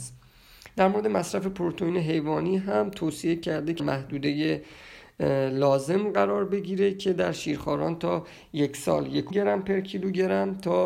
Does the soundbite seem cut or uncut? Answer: cut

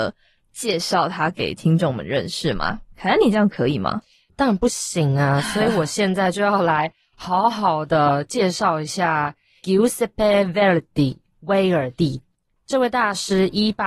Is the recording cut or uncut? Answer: uncut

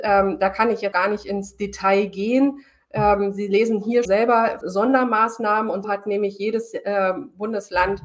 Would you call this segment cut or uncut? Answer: cut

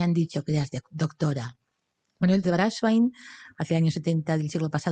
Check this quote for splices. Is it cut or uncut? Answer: cut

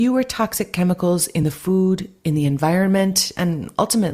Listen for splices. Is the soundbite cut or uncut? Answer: uncut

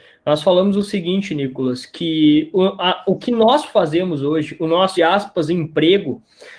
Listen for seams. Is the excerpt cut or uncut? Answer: cut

